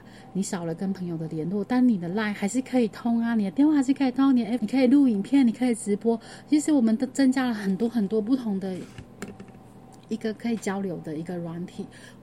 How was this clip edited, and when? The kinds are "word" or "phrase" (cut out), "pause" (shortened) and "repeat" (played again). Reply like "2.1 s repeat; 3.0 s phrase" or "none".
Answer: 4.6 s word